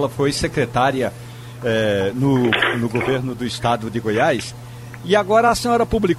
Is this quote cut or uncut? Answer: uncut